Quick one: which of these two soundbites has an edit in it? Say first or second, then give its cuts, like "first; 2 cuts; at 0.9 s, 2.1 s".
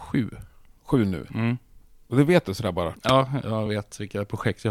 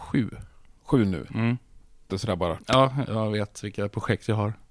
second; 1 cut; at 2.1 s